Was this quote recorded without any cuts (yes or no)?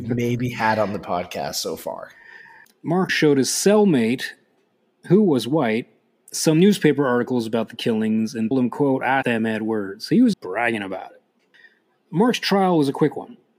no